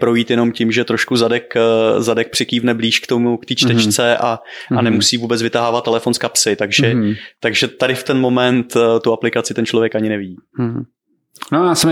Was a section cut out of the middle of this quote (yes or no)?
no